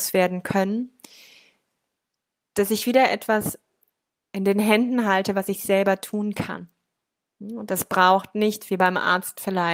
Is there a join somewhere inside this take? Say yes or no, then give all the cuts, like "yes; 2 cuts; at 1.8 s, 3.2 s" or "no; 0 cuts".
no; 0 cuts